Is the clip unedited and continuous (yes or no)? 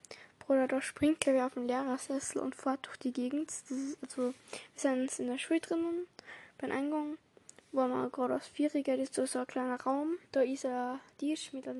no